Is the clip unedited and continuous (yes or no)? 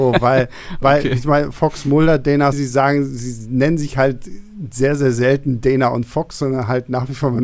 no